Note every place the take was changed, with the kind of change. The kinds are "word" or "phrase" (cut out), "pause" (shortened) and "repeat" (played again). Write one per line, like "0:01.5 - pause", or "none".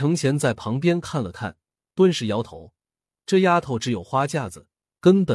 0:02.8 - pause